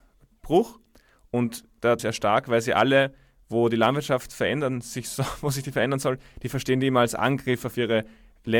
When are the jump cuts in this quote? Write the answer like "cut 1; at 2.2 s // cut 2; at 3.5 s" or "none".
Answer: cut 1; at 2.0 s

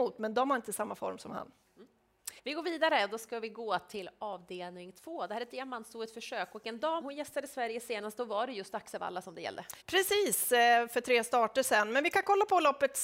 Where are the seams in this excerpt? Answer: cut 1; at 2.4 s // cut 2; at 7.0 s // cut 3; at 9.8 s

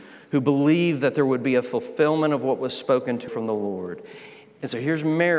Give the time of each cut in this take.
cut 1; at 3.3 s

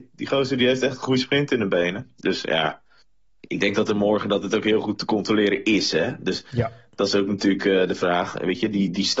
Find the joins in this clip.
cut 1; at 3.0 s

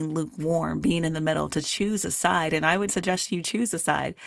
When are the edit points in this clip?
cut 1; at 2.9 s

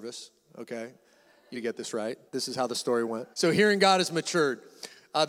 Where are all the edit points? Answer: cut 1; at 1.5 s // cut 2; at 2.3 s // cut 3; at 3.3 s

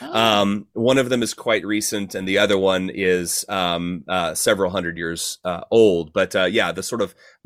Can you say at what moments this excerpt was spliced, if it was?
none

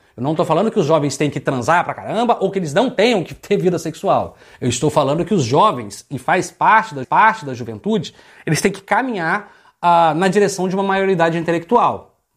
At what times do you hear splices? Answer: cut 1; at 7.0 s

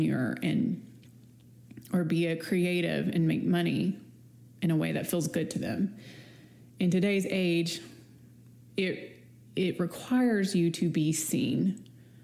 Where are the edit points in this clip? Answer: none

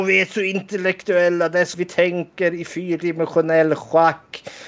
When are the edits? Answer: cut 1; at 1.7 s

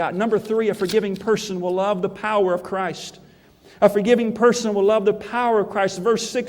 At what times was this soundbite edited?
none

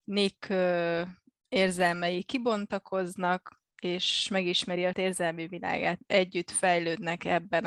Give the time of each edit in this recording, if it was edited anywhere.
cut 1; at 1.4 s // cut 2; at 3.7 s // cut 3; at 4.9 s // cut 4; at 6.0 s

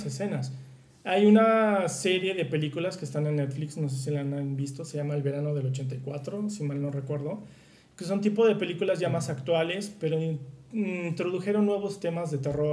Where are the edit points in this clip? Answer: none

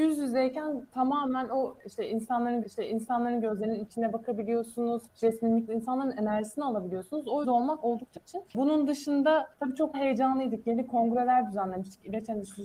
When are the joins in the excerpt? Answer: cut 1; at 2.6 s // cut 2; at 5.1 s // cut 3; at 5.7 s // cut 4; at 7.4 s // cut 5; at 8.2 s // cut 6; at 8.5 s // cut 7; at 9.5 s // cut 8; at 9.9 s

